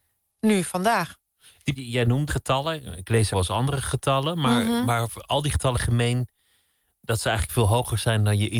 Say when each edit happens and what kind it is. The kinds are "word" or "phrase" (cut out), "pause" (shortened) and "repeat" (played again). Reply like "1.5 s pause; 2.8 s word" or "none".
1.8 s word; 2.3 s word; 3.3 s word; 5.7 s word